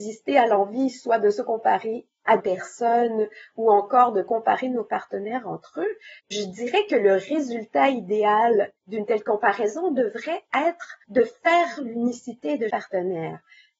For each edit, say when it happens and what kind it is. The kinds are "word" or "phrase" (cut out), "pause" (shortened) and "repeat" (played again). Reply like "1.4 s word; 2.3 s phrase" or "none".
2.4 s word; 6.2 s pause; 8.8 s pause; 11.0 s pause; 11.8 s word; 12.7 s word